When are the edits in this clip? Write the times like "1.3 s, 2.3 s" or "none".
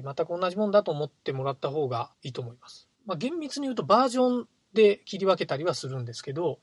2.1 s, 2.9 s